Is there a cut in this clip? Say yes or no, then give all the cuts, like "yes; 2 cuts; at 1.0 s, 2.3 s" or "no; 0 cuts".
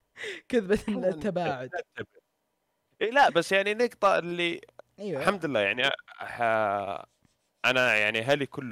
no; 0 cuts